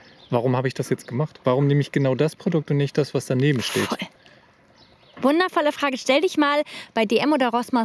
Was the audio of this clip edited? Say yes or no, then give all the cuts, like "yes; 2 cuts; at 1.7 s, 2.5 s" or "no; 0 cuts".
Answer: no; 0 cuts